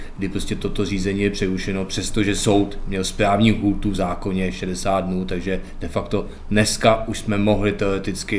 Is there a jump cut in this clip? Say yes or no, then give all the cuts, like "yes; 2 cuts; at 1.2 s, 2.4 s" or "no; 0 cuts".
no; 0 cuts